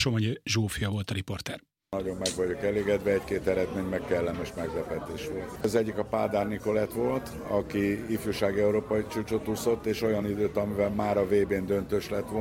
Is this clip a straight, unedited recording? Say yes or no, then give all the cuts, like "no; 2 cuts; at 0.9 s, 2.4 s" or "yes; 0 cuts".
yes; 0 cuts